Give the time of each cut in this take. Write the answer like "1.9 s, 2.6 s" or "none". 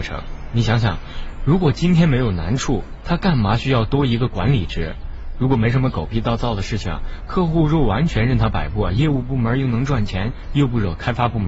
none